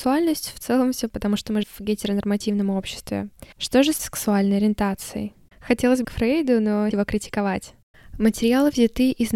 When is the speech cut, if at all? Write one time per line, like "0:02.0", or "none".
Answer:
0:01.1
0:01.6
0:03.5
0:04.0
0:06.0
0:06.9